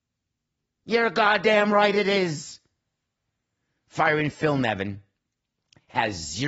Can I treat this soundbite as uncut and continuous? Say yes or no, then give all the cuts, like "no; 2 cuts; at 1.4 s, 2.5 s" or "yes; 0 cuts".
yes; 0 cuts